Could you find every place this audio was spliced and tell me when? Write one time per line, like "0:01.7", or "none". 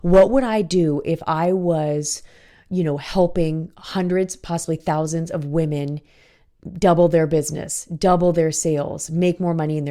none